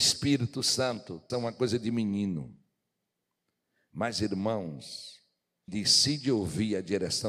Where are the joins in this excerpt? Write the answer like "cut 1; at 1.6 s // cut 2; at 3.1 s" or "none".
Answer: cut 1; at 1.3 s // cut 2; at 5.7 s